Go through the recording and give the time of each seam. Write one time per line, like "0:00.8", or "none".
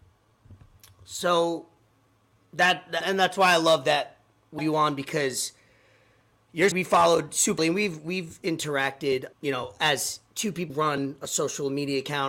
0:03.0
0:04.6
0:06.7
0:07.6
0:09.3
0:10.7